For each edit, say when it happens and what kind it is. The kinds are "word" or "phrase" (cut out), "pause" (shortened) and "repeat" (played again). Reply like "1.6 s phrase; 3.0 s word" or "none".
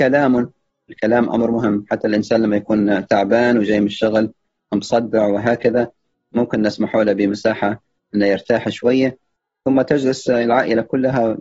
none